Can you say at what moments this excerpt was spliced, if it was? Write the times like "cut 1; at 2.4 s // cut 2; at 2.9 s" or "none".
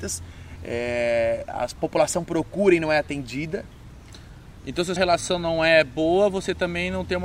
cut 1; at 1.8 s // cut 2; at 5.0 s